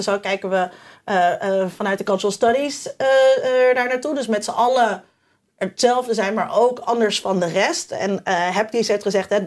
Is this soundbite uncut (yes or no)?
yes